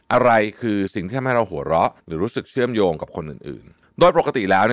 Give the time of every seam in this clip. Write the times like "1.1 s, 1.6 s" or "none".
2.0 s